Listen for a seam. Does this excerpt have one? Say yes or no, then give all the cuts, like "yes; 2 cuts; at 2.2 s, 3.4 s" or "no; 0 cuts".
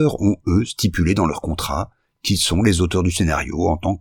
no; 0 cuts